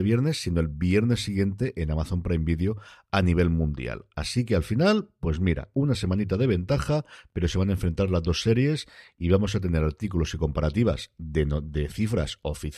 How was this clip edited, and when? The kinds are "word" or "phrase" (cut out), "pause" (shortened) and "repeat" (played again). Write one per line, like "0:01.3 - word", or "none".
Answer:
none